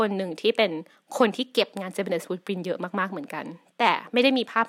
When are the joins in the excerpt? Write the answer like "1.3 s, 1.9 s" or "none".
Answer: none